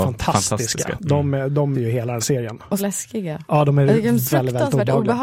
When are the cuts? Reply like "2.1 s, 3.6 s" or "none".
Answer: 1.7 s, 2.2 s, 2.8 s, 4.3 s